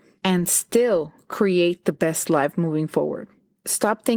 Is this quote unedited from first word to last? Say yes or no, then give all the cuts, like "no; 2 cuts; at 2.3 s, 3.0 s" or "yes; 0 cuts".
yes; 0 cuts